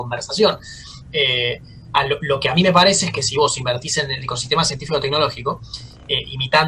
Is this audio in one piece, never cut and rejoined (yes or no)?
yes